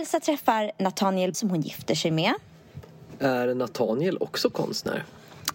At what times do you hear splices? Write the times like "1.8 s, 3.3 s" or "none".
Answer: 1.3 s